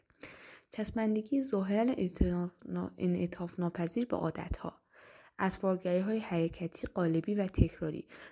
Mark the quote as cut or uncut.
uncut